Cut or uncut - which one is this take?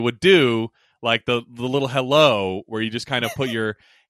uncut